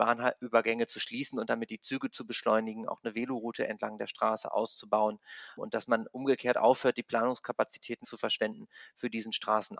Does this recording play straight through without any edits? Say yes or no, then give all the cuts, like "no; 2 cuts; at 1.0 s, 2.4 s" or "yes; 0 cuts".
no; 2 cuts; at 5.6 s, 8.0 s